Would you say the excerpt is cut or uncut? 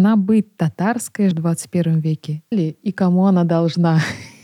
cut